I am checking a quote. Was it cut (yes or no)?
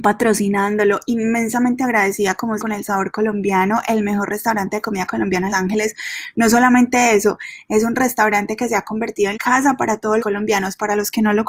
yes